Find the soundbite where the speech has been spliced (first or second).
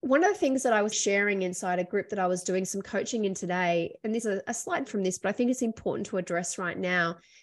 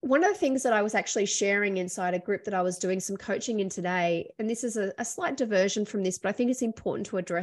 first